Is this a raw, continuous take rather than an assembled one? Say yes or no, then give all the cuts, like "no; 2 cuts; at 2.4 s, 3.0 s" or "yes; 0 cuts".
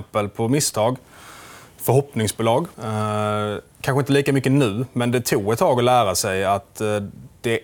no; 1 cut; at 2.7 s